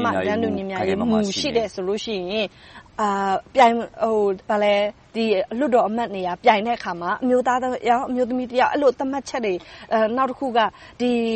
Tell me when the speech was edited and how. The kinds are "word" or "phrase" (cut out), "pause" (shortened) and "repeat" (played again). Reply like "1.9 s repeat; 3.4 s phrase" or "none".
4.4 s pause